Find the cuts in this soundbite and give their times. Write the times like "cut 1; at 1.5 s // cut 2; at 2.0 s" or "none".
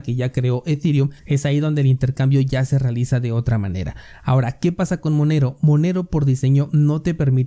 cut 1; at 1.2 s